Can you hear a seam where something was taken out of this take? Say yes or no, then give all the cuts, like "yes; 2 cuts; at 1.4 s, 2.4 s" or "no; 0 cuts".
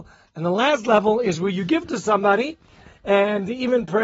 no; 0 cuts